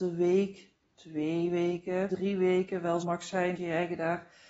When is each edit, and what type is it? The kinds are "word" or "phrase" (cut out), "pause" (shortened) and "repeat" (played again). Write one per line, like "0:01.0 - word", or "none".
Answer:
0:02.1 - word
0:03.0 - word
0:03.6 - word

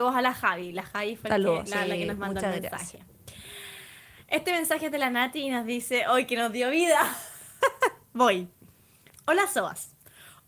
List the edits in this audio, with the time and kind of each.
none

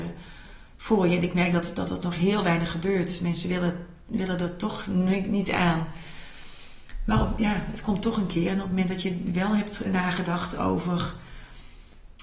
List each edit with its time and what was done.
0:09.8 - word

